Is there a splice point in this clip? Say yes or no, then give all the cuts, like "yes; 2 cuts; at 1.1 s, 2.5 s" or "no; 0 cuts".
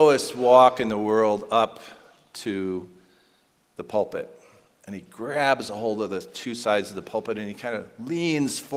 no; 0 cuts